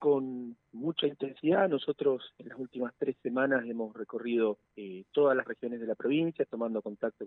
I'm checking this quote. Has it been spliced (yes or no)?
yes